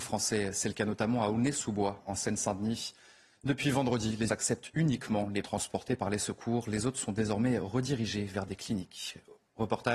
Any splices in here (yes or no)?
yes